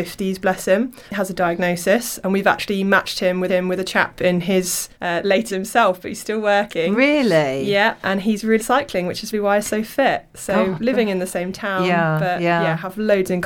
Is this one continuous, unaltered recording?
no; 6 cuts; at 1.1 s, 3.5 s, 4.9 s, 5.5 s, 8.6 s, 9.3 s

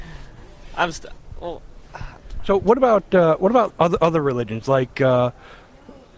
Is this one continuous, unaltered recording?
no; 1 cut; at 3.7 s

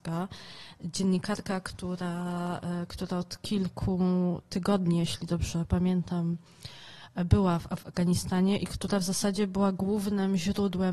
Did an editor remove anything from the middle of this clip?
no; 0 cuts

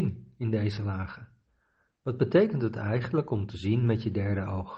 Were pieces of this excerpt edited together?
no; 0 cuts

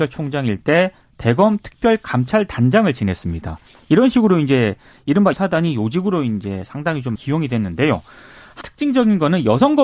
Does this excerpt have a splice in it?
yes; 3 cuts; at 5.3 s, 7.2 s, 8.6 s

